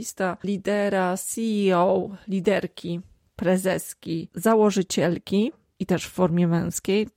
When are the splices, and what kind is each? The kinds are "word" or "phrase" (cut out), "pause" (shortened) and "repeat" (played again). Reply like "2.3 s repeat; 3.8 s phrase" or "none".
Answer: none